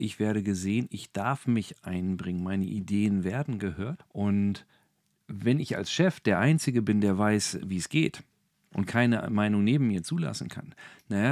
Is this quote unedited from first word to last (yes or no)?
yes